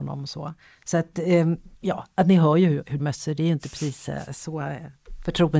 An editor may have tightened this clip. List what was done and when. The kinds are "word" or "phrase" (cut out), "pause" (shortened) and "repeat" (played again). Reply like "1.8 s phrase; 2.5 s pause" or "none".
1.7 s pause; 3.0 s phrase